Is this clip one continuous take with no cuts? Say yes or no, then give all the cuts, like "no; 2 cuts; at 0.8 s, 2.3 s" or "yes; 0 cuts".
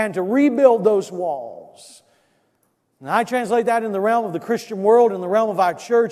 yes; 0 cuts